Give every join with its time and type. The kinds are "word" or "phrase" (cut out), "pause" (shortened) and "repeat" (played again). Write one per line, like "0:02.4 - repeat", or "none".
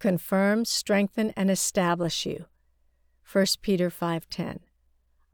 none